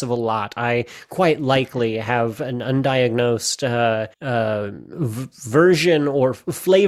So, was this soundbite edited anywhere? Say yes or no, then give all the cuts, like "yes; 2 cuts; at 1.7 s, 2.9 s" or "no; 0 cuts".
yes; 1 cut; at 4.1 s